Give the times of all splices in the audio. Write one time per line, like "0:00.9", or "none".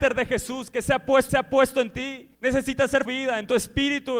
0:01.3
0:02.3
0:03.0